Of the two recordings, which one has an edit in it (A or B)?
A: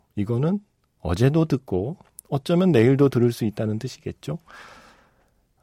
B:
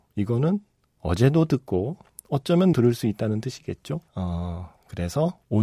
B